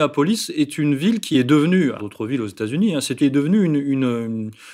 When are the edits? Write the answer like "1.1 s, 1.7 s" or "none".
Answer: 1.3 s, 2.0 s, 3.2 s